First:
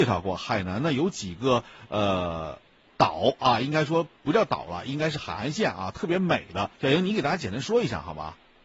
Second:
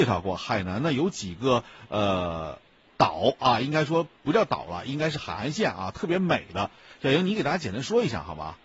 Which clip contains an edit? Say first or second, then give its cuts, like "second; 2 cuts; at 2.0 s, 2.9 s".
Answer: first; 1 cut; at 6.7 s